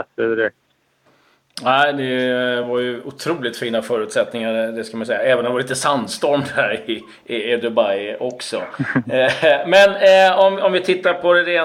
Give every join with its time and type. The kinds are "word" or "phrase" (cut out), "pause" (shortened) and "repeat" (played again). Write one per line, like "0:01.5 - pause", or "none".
none